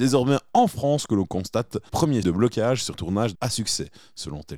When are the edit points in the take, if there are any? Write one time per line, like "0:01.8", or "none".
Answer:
0:01.9
0:02.2
0:02.9
0:03.3